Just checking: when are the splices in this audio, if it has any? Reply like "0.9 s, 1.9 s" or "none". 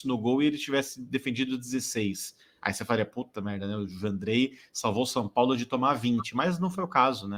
none